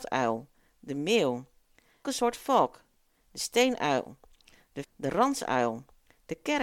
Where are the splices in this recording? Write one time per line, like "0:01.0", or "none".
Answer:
0:02.0
0:04.8